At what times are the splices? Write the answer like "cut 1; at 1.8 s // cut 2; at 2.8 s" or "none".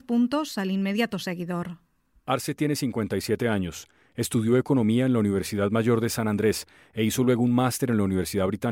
none